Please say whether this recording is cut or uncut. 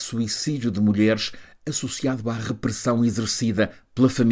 uncut